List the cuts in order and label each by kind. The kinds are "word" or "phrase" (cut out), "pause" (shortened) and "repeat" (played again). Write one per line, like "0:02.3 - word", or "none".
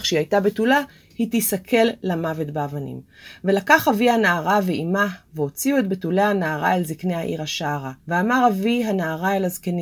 0:08.0 - pause